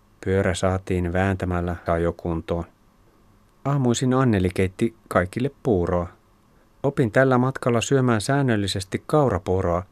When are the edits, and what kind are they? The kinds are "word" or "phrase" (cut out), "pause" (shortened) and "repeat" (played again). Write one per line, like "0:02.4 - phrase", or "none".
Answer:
0:01.9 - word

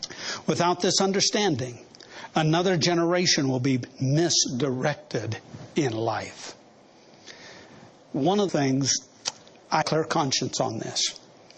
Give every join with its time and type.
0:08.5 - word
0:09.8 - phrase

